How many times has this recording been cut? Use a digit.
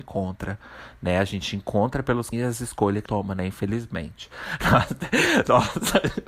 2